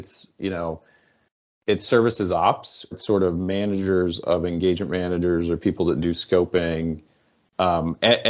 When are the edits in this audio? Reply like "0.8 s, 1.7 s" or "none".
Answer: 2.9 s